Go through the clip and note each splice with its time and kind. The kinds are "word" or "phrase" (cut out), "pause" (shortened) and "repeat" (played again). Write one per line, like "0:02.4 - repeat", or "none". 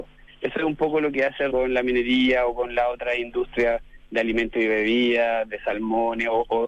0:01.5 - word

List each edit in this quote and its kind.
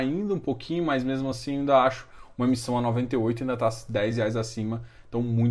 none

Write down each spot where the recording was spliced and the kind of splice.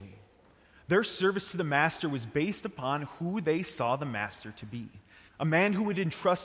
0:05.3 - pause

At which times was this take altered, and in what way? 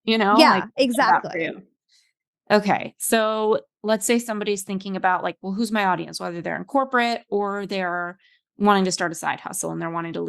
none

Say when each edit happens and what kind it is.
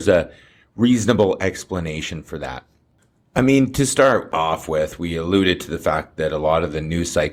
none

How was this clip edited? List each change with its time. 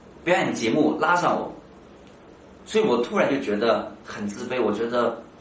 none

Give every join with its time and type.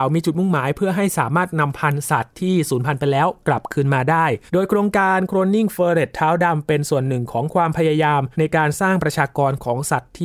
0:04.5 - pause
0:08.3 - pause

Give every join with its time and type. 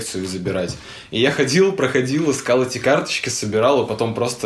none

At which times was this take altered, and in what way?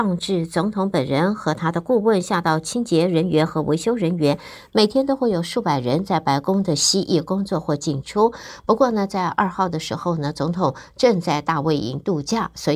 none

